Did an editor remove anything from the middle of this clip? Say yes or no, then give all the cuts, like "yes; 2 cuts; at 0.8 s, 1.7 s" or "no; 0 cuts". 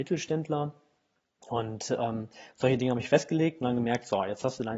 no; 0 cuts